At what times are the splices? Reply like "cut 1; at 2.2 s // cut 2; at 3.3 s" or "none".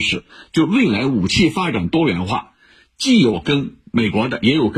none